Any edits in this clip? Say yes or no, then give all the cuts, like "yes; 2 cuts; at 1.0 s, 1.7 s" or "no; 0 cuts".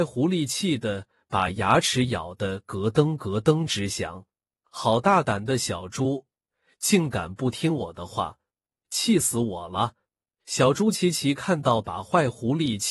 no; 0 cuts